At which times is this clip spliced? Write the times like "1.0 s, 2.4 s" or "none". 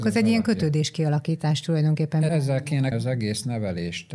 2.9 s

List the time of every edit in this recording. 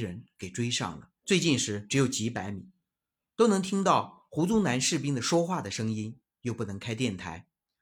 1.2 s

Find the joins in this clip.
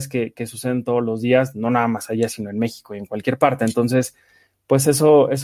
none

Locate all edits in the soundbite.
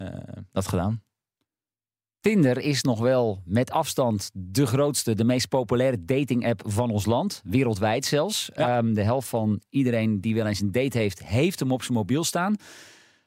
none

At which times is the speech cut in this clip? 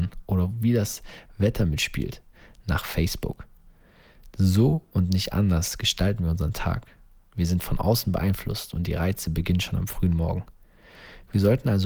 none

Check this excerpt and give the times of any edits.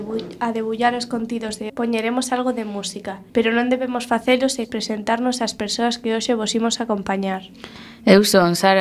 1.7 s, 3.3 s, 4.6 s

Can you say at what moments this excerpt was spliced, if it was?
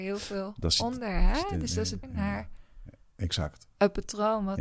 2.0 s

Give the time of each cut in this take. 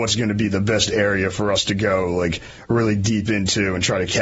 none

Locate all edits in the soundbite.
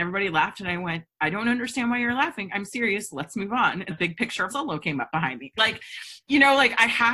3.9 s, 4.5 s

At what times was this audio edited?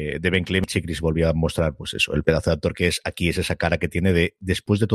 none

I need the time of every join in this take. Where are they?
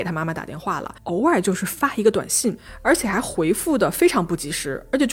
1.0 s

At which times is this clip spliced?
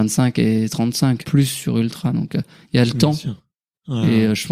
1.2 s

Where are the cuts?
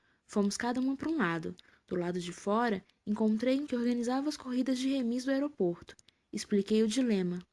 3.7 s

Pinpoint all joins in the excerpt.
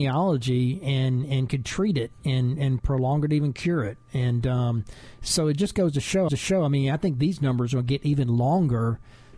6.3 s

